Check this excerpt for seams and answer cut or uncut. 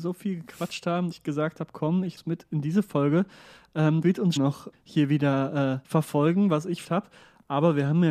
cut